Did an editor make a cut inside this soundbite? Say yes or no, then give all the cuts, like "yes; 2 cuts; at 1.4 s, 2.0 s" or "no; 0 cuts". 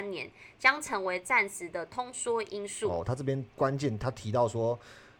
yes; 1 cut; at 3.5 s